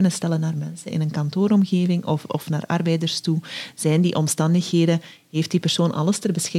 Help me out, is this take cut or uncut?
uncut